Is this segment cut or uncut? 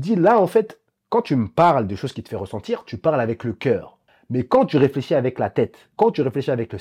uncut